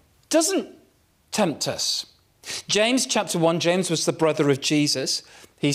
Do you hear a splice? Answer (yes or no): no